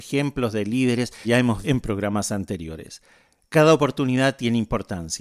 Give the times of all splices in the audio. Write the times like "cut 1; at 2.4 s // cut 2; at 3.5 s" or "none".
cut 1; at 1.2 s // cut 2; at 1.6 s